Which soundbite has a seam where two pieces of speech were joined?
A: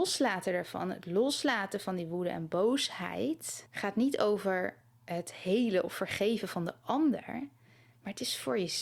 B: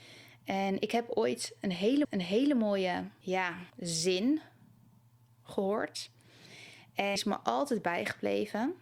B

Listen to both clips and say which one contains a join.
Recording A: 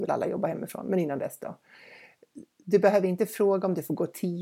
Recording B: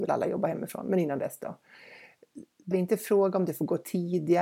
B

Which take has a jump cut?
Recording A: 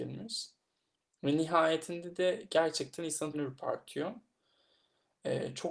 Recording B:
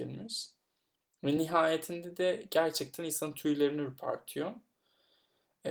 A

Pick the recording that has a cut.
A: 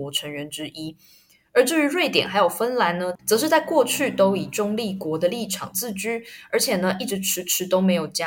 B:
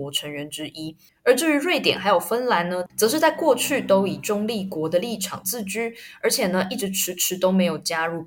B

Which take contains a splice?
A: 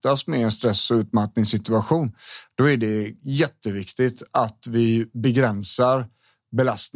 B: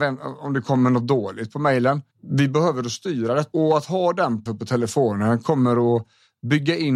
B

